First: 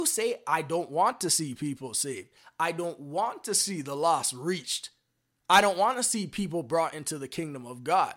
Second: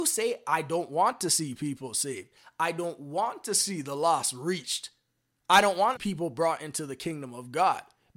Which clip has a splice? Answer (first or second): second